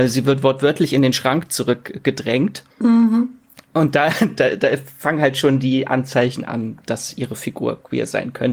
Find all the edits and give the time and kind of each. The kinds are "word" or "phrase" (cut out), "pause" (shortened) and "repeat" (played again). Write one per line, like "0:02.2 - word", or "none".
0:02.7 - pause